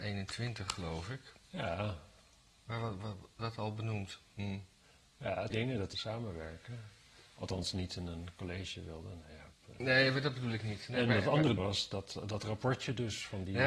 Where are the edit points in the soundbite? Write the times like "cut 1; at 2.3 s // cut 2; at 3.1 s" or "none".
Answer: cut 1; at 3.4 s // cut 2; at 5.5 s // cut 3; at 5.9 s // cut 4; at 11.6 s